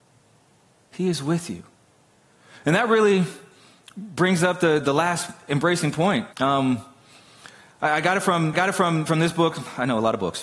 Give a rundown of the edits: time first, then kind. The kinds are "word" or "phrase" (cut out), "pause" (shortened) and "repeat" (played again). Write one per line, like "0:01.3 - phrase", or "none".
0:04.8 - word
0:06.3 - pause
0:08.5 - repeat